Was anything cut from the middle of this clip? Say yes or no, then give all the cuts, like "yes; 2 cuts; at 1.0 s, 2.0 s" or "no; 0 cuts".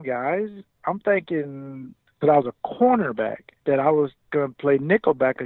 yes; 3 cuts; at 2.2 s, 3.6 s, 4.3 s